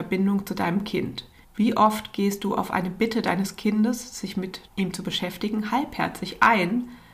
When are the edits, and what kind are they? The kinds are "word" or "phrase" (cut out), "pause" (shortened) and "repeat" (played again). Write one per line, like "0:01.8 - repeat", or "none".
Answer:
0:01.4 - pause
0:04.7 - pause